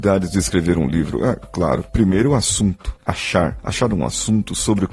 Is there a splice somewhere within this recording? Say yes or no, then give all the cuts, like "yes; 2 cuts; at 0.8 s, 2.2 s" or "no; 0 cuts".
no; 0 cuts